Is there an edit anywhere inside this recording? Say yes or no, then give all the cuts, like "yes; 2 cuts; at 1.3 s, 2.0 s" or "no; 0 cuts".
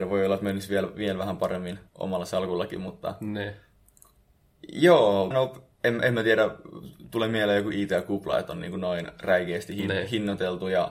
yes; 2 cuts; at 1.9 s, 5.3 s